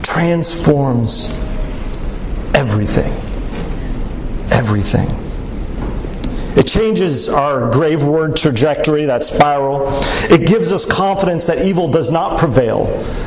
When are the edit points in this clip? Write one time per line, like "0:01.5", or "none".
none